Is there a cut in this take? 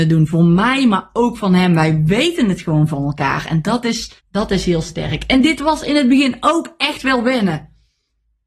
yes; 1 cut; at 4.2 s

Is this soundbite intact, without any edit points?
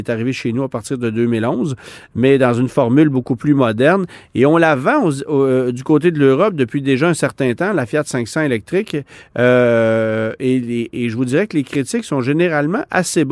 yes; 0 cuts

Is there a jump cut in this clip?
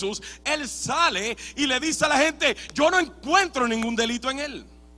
no; 0 cuts

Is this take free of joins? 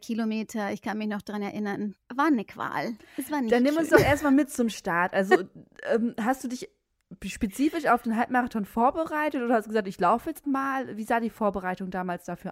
no; 2 cuts; at 2.0 s, 10.4 s

